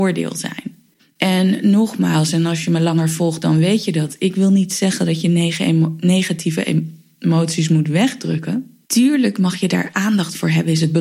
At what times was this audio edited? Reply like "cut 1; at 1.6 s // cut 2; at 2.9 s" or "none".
cut 1; at 1.0 s // cut 2; at 8.8 s